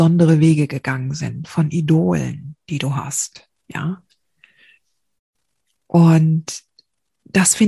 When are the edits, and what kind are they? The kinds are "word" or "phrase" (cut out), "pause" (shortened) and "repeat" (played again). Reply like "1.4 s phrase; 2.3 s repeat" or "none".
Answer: none